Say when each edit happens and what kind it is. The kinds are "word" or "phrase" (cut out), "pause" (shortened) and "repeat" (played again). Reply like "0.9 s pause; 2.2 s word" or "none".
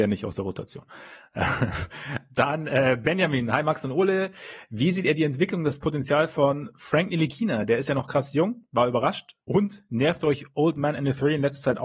9.4 s pause